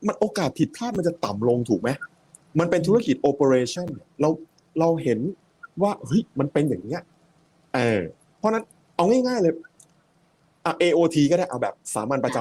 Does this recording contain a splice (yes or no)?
no